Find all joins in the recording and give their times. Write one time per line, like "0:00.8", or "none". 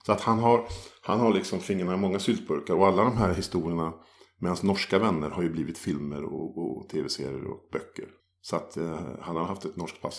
0:08.2